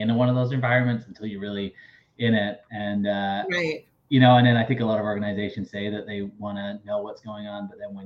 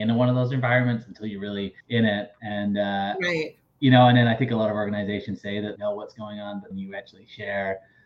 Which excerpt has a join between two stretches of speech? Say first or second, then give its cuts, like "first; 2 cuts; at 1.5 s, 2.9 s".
second; 3 cuts; at 1.8 s, 5.8 s, 6.7 s